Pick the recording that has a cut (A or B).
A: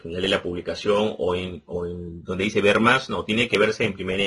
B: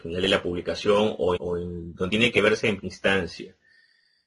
B